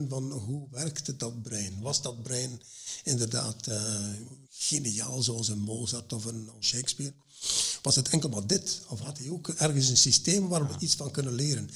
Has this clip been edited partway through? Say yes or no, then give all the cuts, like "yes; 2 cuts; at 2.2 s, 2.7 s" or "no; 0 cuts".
yes; 2 cuts; at 4.4 s, 6.6 s